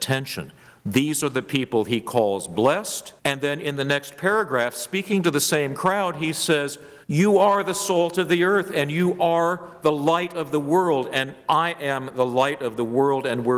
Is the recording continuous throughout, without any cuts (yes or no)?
no